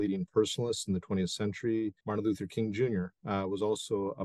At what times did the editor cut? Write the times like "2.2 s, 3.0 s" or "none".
2.0 s